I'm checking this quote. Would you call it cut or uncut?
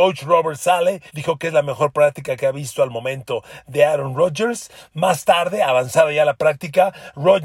cut